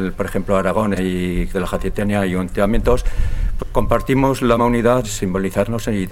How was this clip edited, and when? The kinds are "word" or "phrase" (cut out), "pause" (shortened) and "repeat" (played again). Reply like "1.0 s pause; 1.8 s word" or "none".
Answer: 1.0 s word; 1.5 s word; 3.6 s word; 4.6 s word; 5.0 s word